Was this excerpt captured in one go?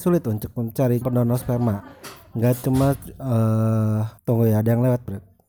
no; 2 cuts; at 1.0 s, 4.2 s

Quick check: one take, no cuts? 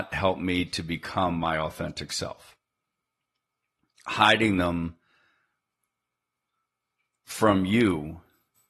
yes; 0 cuts

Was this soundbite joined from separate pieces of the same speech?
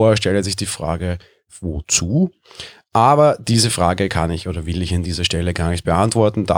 no; 0 cuts

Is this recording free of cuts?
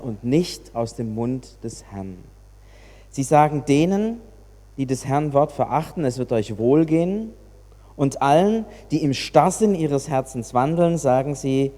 yes; 0 cuts

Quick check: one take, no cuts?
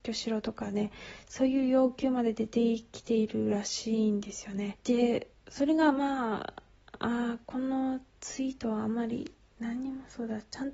no; 1 cut; at 4.8 s

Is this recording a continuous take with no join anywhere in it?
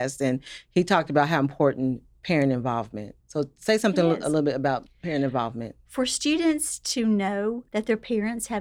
no; 2 cuts; at 3.2 s, 7.7 s

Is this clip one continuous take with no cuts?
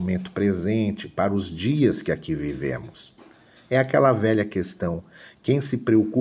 yes; 0 cuts

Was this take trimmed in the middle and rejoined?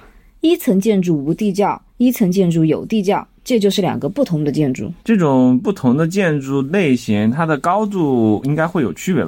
yes; 2 cuts; at 1.9 s, 5.0 s

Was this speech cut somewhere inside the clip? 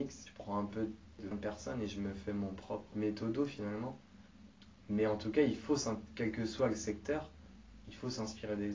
yes; 2 cuts; at 1.3 s, 2.9 s

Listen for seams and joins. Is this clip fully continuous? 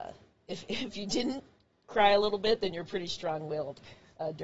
yes; 0 cuts

